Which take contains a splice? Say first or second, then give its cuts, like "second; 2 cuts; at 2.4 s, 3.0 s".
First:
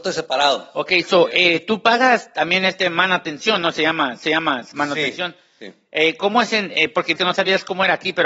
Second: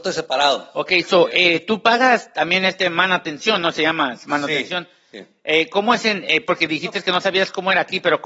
first; 2 cuts; at 4.2 s, 7.2 s